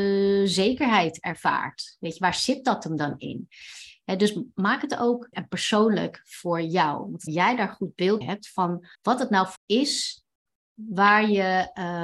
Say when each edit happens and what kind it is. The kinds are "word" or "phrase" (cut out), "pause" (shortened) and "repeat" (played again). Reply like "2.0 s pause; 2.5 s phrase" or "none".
5.3 s word; 7.3 s phrase; 8.2 s word; 8.9 s pause; 9.6 s word